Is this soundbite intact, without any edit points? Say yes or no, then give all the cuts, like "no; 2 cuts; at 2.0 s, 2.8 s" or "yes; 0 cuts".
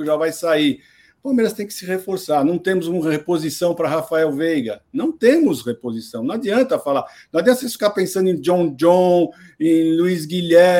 yes; 0 cuts